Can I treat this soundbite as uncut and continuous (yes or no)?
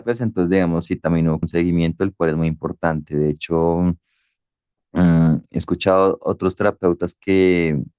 no